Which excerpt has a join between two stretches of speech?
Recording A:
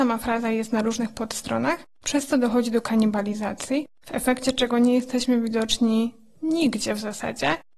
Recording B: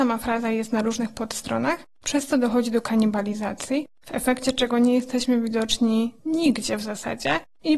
B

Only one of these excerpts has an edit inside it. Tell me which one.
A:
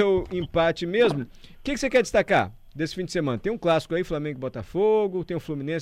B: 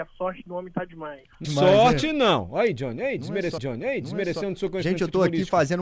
B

